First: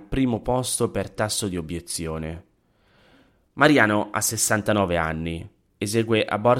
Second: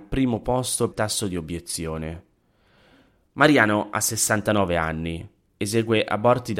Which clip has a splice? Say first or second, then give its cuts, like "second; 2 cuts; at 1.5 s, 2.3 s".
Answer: second; 1 cut; at 0.9 s